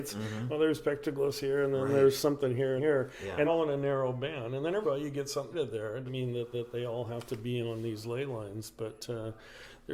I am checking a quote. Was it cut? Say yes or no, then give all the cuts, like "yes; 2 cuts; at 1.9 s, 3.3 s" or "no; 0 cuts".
yes; 6 cuts; at 2.8 s, 3.5 s, 4.8 s, 5.5 s, 6.1 s, 6.5 s